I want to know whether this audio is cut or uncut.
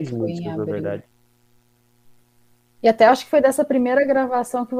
uncut